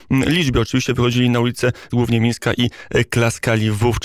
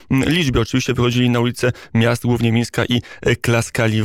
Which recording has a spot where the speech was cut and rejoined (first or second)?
first